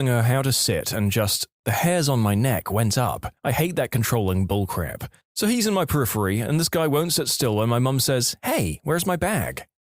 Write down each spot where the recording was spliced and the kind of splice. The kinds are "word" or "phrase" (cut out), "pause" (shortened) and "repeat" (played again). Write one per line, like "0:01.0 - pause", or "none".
0:03.4 - pause